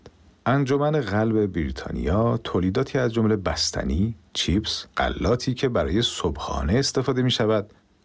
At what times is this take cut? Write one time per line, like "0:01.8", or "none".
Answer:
0:04.9